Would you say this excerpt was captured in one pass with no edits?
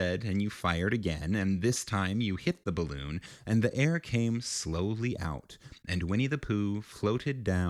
yes; 0 cuts

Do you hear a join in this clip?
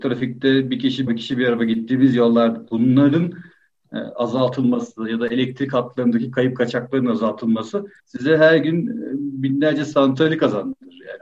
yes; 2 cuts; at 1.1 s, 8.0 s

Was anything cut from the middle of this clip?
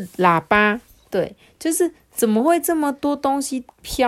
yes; 1 cut; at 2.0 s

